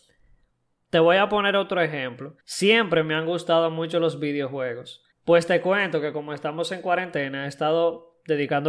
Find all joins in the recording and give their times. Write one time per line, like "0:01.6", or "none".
0:02.4
0:05.1